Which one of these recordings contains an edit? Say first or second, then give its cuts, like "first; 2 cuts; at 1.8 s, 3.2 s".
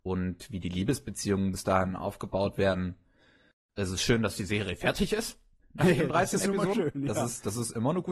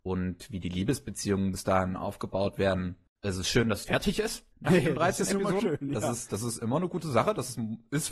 second; 3 cuts; at 3.1 s, 3.8 s, 4.5 s